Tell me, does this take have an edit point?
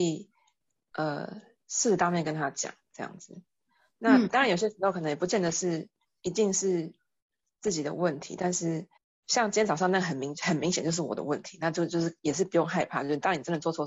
yes; 1 cut; at 9.0 s

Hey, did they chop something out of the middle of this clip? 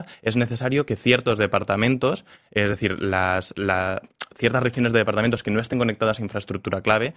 no; 0 cuts

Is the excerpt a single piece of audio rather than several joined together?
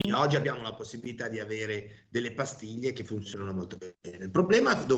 yes; 0 cuts

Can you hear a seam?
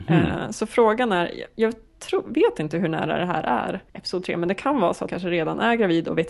yes; 2 cuts; at 3.9 s, 5.1 s

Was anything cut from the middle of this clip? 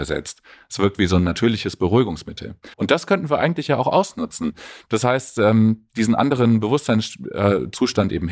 yes; 1 cut; at 2.7 s

